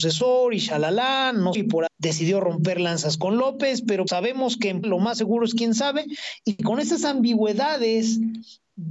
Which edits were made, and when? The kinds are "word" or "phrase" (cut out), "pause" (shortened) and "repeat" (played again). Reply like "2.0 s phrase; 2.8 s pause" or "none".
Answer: 1.5 s word; 1.9 s word; 4.1 s word; 4.8 s word